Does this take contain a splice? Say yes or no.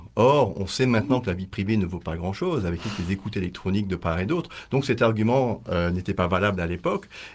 no